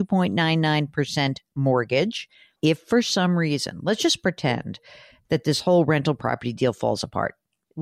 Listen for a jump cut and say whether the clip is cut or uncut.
uncut